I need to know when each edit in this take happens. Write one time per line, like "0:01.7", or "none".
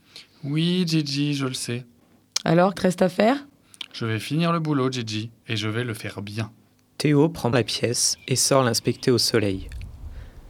0:02.7
0:06.7
0:07.5